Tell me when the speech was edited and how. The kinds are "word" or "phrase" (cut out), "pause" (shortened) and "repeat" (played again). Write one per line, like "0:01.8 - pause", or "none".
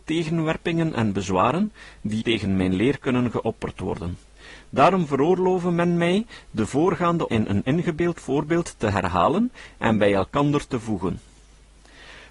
0:02.2 - word
0:07.3 - word